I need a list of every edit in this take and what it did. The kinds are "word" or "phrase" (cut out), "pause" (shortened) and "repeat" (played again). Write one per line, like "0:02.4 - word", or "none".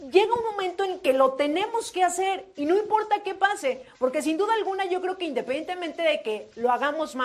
none